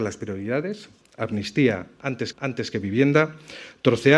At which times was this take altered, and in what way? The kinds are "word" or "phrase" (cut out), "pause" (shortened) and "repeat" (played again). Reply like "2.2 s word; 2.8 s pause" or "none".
2.3 s repeat